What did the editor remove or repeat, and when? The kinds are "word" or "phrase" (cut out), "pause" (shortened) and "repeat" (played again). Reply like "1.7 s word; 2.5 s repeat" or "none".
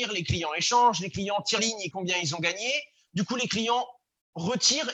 1.6 s word; 1.9 s word

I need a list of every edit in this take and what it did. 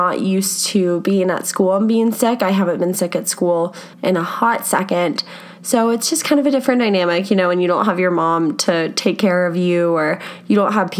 3.9 s pause

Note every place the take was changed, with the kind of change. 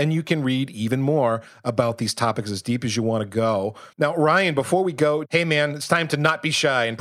3.9 s pause

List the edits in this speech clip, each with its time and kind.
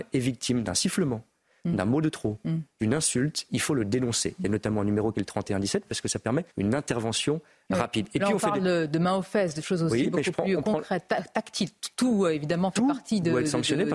6.5 s pause

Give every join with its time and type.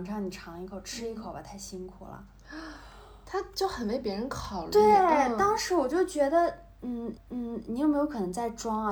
7.2 s repeat

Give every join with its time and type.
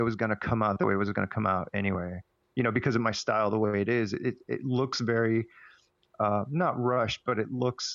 none

